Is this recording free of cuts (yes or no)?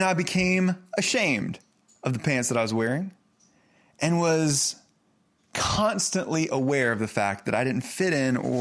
yes